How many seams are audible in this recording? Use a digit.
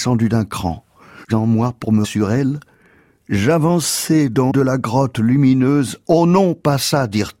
3